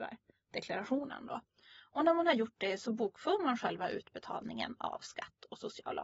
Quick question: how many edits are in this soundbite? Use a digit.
0